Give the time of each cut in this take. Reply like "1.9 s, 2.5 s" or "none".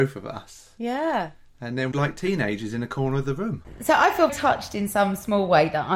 1.9 s, 4.3 s